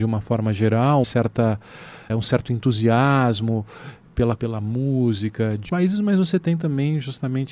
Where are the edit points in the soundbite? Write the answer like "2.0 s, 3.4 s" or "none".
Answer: 1.0 s, 2.1 s, 4.4 s, 5.7 s